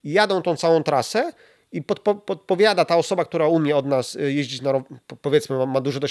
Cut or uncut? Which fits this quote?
uncut